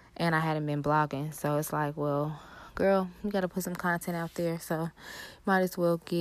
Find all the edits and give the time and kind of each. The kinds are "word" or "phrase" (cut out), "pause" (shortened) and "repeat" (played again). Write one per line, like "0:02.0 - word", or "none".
none